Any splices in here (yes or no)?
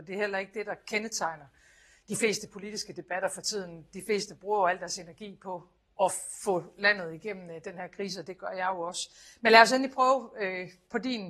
no